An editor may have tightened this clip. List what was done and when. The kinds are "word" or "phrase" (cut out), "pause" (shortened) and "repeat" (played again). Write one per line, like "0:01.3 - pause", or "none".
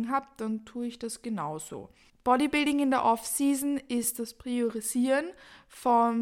0:02.1 - pause